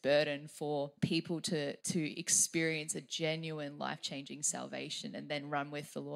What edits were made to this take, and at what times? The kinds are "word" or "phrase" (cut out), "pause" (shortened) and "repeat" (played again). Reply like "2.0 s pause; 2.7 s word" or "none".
1.0 s pause; 1.8 s pause